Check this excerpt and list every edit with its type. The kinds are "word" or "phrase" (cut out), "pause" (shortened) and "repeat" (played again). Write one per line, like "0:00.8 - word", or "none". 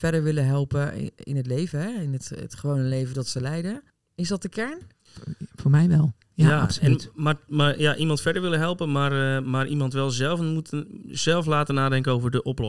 0:03.9 - pause
0:04.9 - pause